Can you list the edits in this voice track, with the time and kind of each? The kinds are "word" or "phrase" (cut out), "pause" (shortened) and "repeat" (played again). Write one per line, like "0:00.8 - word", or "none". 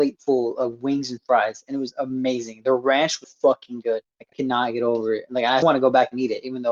0:03.2 - word
0:04.3 - word
0:05.6 - word